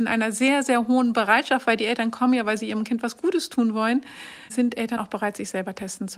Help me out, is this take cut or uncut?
cut